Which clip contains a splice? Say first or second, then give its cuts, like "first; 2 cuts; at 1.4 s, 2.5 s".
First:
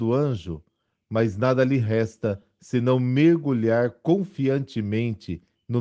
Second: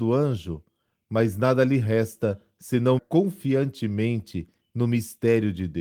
second; 1 cut; at 3.0 s